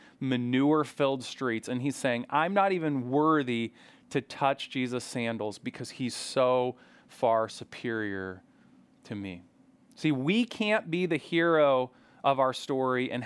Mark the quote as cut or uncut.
uncut